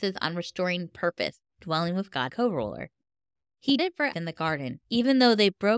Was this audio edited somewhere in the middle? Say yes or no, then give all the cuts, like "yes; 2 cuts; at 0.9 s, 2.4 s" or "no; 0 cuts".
yes; 5 cuts; at 1.5 s, 2.3 s, 3.8 s, 4.1 s, 4.8 s